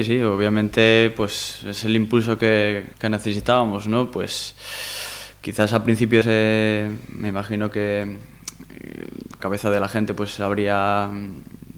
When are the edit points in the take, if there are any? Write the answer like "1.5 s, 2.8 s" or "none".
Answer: 2.9 s, 6.2 s, 9.4 s